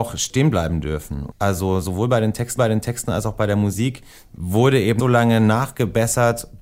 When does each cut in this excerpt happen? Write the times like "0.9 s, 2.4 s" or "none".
2.6 s, 4.1 s, 5.0 s